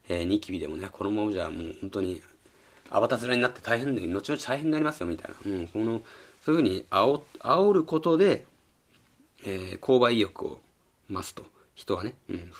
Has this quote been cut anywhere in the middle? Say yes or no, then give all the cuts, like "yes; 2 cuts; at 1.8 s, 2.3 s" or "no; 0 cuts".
no; 0 cuts